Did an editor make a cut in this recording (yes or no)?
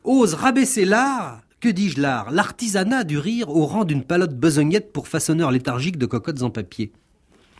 yes